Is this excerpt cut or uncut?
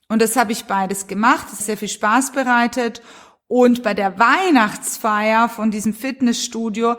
cut